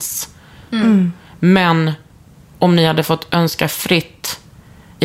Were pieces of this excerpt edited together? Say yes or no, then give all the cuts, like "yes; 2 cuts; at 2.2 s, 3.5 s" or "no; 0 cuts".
no; 0 cuts